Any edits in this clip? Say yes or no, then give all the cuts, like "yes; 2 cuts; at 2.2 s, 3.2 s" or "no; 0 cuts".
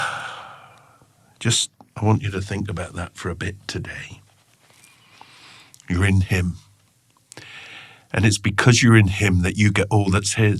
no; 0 cuts